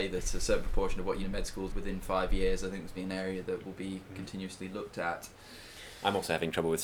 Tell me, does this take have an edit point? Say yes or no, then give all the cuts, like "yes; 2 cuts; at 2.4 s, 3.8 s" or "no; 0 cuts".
yes; 3 cuts; at 1.2 s, 1.7 s, 3.0 s